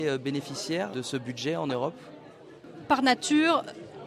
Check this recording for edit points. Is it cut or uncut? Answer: cut